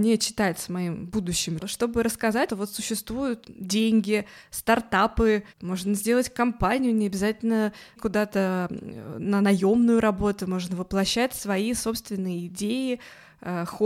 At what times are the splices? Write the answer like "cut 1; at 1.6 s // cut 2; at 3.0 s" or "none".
cut 1; at 1.6 s // cut 2; at 2.5 s // cut 3; at 3.4 s // cut 4; at 5.5 s // cut 5; at 8.0 s